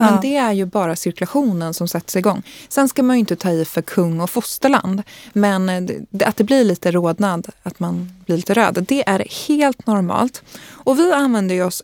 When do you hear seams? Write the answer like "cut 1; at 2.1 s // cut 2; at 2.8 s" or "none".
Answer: none